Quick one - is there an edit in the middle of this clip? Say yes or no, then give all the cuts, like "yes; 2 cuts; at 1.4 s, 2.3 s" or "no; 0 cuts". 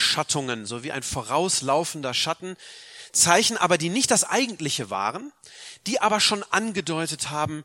no; 0 cuts